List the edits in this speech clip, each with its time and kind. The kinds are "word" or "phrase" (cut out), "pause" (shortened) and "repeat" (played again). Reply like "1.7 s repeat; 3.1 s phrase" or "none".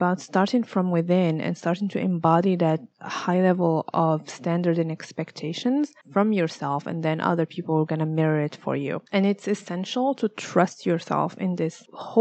6.0 s pause; 9.1 s pause